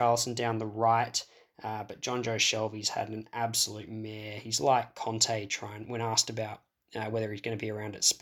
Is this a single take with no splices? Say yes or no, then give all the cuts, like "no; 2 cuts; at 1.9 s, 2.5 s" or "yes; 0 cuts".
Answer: yes; 0 cuts